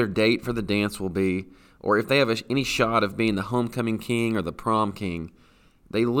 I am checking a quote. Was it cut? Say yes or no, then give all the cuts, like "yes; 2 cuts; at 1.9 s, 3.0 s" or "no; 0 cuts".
no; 0 cuts